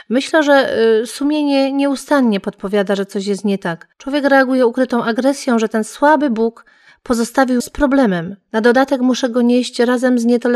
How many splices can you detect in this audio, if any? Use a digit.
2